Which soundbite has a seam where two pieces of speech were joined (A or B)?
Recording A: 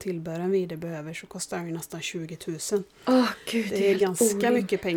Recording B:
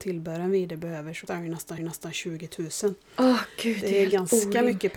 B